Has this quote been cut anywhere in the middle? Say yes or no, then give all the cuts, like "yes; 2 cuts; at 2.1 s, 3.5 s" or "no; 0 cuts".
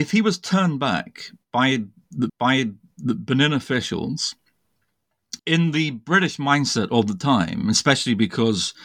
yes; 2 cuts; at 2.3 s, 5.4 s